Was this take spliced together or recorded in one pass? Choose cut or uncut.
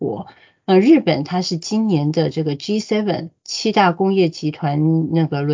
cut